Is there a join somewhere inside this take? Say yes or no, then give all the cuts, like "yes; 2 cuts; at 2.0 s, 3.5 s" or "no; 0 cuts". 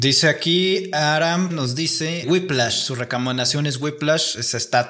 yes; 2 cuts; at 1.5 s, 2.2 s